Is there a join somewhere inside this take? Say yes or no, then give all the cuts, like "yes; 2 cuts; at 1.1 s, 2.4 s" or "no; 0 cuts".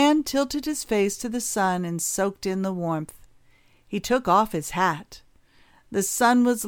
no; 0 cuts